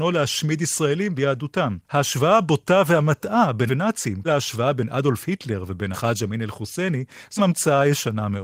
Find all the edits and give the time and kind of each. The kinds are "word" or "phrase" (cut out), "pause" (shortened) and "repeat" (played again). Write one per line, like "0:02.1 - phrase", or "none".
0:01.2 - word
0:01.8 - pause
0:03.7 - word
0:04.2 - word
0:05.9 - word
0:07.4 - word